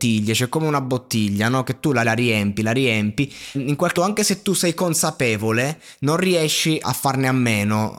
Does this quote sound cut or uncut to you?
cut